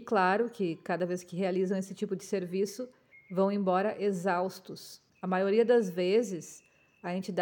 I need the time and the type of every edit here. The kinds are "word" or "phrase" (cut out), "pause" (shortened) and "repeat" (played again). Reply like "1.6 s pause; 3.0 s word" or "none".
3.1 s pause; 5.1 s pause